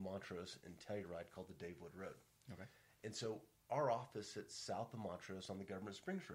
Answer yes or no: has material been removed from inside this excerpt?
no